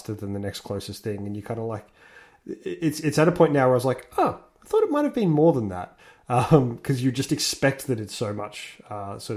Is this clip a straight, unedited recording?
yes; 0 cuts

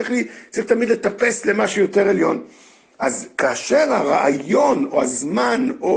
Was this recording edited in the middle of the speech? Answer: no; 0 cuts

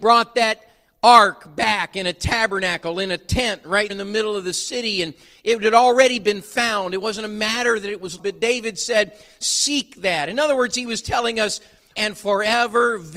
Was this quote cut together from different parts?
yes; 3 cuts; at 3.9 s, 8.2 s, 12.0 s

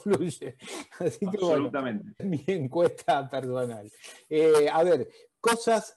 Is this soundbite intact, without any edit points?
no; 1 cut; at 2.2 s

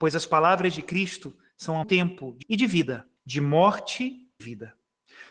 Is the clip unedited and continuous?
no; 4 cuts; at 1.8 s, 2.4 s, 3.2 s, 4.4 s

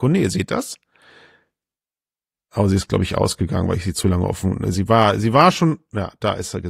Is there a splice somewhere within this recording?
no; 0 cuts

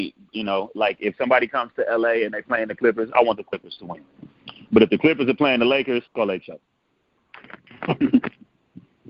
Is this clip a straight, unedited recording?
no; 1 cut; at 6.1 s

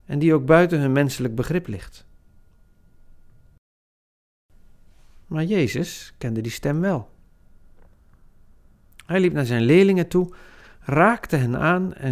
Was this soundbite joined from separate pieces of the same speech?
no; 0 cuts

